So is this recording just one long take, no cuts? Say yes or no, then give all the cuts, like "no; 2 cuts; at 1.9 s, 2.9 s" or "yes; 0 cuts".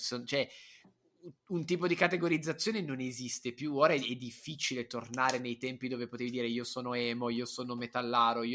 no; 1 cut; at 1.4 s